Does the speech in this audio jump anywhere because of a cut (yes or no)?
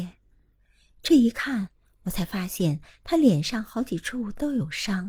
no